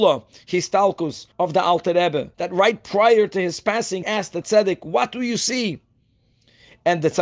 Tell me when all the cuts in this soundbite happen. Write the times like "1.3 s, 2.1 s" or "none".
1.3 s, 2.3 s, 4.0 s, 4.4 s